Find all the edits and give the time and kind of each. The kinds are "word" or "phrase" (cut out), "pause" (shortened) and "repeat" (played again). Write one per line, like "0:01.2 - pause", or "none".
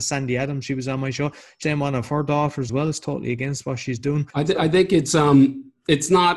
0:01.6 - word
0:02.7 - word
0:04.3 - pause